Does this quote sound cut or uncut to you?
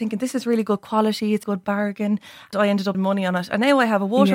cut